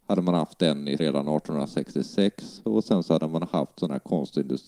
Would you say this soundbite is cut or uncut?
cut